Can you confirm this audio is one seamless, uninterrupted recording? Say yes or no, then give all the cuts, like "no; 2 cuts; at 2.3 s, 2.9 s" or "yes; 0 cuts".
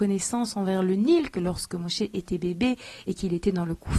yes; 0 cuts